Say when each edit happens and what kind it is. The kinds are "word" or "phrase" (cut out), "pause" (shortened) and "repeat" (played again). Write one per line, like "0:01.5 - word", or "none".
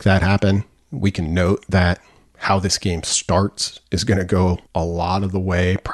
0:04.7 - pause